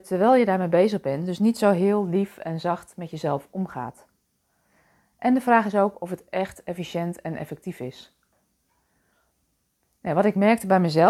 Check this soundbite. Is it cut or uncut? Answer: uncut